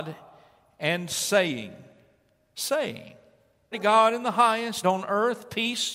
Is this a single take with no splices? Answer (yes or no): no